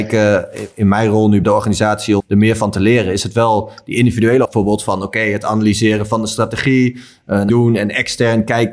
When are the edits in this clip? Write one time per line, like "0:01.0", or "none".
0:01.4
0:02.2
0:04.4
0:07.5